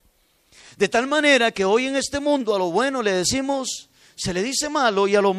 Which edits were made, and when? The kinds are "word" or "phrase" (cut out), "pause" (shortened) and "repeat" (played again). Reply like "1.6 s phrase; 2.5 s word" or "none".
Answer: none